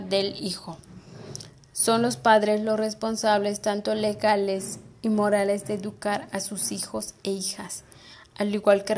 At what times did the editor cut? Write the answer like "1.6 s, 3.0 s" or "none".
none